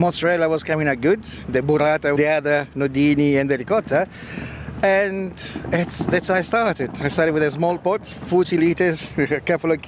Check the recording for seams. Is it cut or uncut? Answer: cut